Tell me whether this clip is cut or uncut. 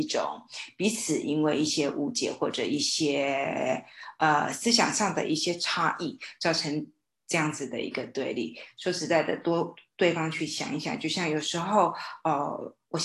uncut